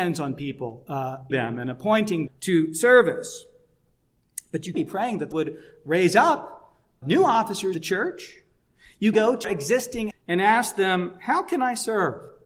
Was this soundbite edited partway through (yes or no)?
yes